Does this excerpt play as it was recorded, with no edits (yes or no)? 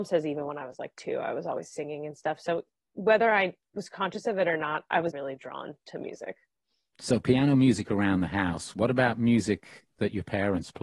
no